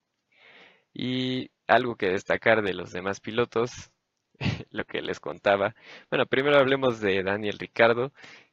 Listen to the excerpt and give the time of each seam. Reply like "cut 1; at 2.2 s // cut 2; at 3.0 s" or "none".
none